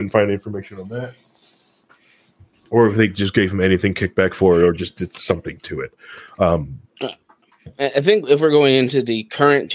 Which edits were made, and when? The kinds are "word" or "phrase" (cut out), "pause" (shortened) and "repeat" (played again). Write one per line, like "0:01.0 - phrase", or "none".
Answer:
none